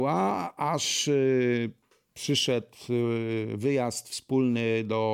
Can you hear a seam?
no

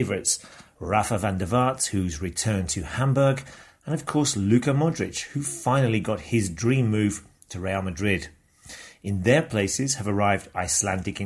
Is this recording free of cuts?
yes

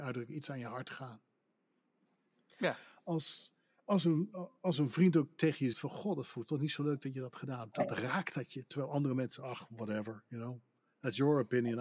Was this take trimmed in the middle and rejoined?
yes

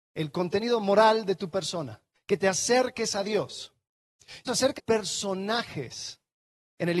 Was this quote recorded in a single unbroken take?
no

